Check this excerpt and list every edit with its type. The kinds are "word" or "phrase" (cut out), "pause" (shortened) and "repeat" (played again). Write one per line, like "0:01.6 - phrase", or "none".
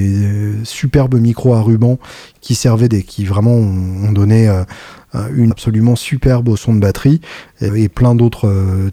0:02.9 - word
0:05.5 - word
0:07.7 - word